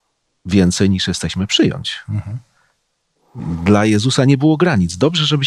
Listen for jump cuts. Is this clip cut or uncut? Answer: uncut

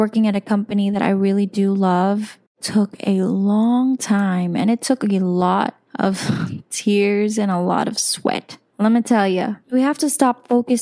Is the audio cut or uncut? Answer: cut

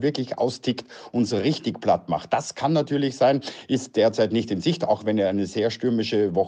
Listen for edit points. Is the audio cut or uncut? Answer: uncut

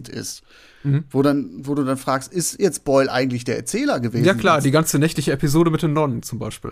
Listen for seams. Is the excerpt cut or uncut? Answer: uncut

